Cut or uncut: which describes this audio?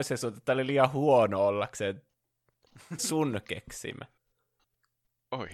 cut